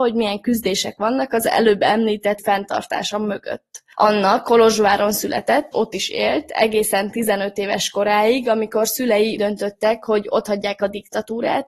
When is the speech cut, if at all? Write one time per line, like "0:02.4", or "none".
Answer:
0:02.4
0:05.7
0:09.4